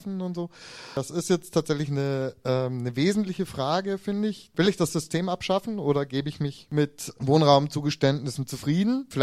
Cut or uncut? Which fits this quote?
uncut